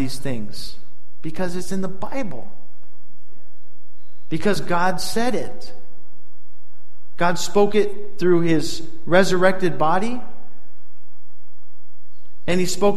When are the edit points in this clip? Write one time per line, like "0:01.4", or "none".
none

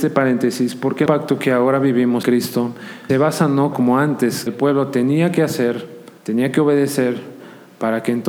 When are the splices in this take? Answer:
0:01.1
0:02.2
0:03.1
0:03.7
0:04.5
0:06.2

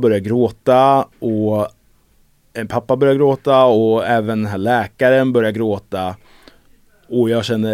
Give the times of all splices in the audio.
none

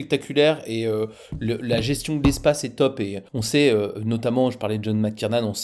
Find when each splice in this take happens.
0:03.3

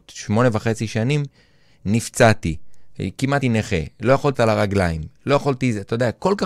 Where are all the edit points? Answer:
0:03.4
0:04.3

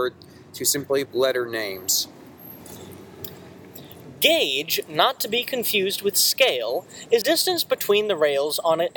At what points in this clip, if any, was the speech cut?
0:01.1
0:07.2

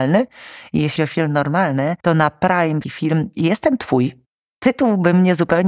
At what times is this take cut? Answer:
0:01.0
0:02.0
0:02.8

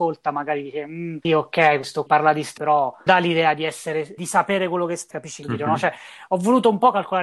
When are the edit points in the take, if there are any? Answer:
0:01.2
0:02.1
0:02.6
0:03.1
0:04.2
0:05.1
0:05.4

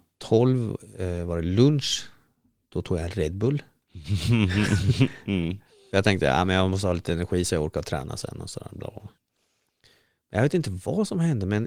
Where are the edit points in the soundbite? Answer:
none

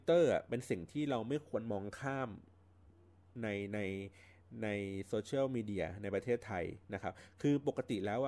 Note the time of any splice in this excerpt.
none

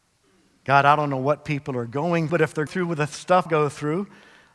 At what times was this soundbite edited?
0:02.3
0:02.7
0:03.5

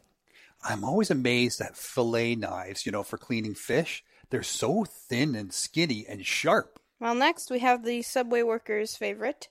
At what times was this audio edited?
none

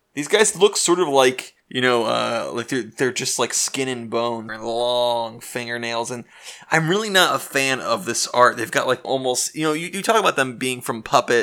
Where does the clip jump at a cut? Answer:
0:01.6
0:04.5
0:09.0

